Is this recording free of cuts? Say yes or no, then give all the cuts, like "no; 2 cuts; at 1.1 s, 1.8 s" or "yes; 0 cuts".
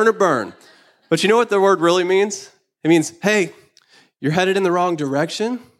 yes; 0 cuts